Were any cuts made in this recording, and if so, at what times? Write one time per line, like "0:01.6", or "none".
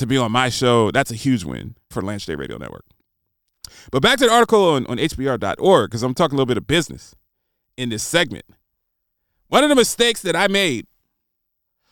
0:01.9